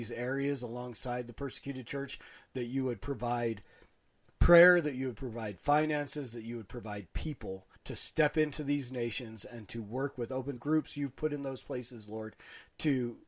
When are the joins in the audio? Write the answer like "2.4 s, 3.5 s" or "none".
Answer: 7.8 s, 10.6 s